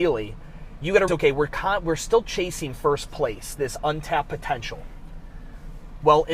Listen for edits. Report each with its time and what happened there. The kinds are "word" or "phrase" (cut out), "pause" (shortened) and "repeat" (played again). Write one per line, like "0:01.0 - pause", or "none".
0:01.1 - word